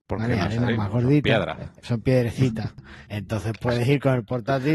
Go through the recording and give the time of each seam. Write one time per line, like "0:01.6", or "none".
0:03.1